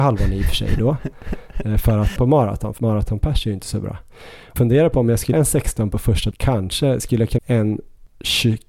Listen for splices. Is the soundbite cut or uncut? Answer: cut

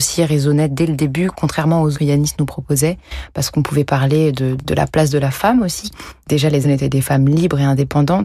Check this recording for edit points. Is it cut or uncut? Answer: cut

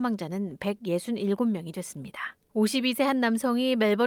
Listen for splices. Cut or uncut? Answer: cut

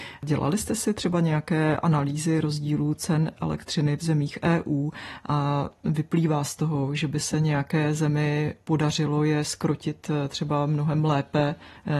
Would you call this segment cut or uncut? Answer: uncut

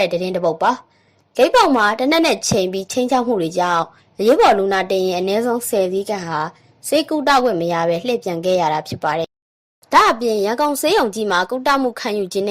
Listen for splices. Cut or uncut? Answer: uncut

